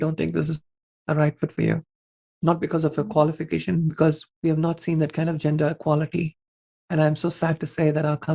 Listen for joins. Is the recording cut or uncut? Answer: uncut